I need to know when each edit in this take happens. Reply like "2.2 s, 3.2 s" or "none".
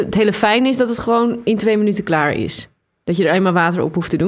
none